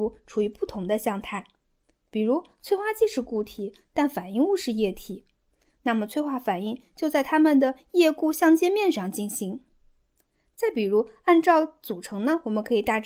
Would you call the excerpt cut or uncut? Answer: uncut